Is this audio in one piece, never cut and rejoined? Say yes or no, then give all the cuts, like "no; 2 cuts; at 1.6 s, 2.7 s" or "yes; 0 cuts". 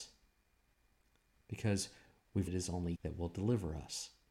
no; 2 cuts; at 2.5 s, 2.9 s